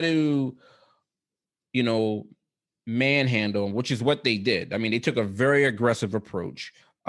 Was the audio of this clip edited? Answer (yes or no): no